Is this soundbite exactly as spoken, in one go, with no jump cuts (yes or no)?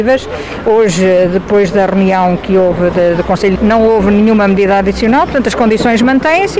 no